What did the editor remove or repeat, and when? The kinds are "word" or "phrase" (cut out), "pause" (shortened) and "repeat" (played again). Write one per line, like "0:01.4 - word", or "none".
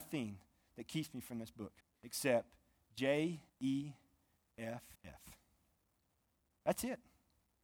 0:01.8 - pause
0:03.5 - pause
0:04.9 - pause